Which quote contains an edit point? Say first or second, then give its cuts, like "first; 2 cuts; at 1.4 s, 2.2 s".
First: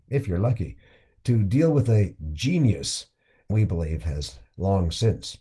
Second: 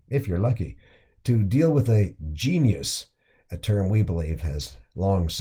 first; 1 cut; at 3.5 s